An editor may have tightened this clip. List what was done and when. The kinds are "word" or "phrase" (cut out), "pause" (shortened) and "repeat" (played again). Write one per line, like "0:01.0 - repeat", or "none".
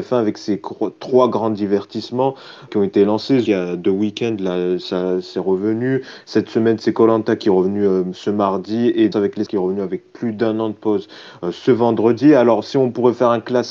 0:02.7 - word
0:03.5 - phrase
0:09.1 - word
0:09.5 - word